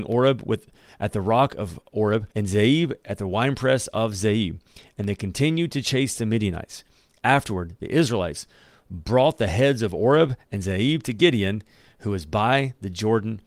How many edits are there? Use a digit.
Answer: 1